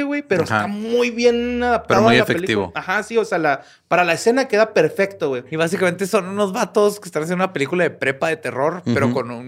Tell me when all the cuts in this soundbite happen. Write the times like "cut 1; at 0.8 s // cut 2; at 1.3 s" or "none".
none